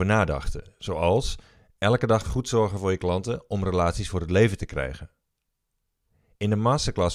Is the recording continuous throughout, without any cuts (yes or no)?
yes